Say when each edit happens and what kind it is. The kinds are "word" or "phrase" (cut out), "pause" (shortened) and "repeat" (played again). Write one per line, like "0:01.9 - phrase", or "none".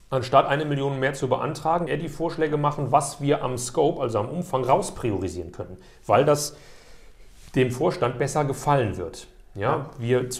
0:01.9 - phrase